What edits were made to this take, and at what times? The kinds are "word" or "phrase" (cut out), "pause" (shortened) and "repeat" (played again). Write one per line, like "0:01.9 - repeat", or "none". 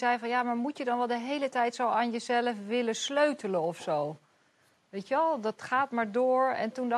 none